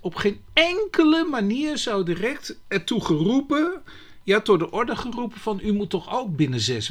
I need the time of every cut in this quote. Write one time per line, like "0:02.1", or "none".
none